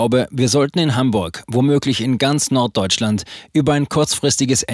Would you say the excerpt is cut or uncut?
uncut